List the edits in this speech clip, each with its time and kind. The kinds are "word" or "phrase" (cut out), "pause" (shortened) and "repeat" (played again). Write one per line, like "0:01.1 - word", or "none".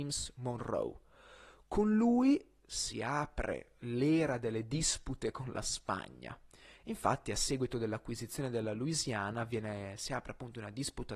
none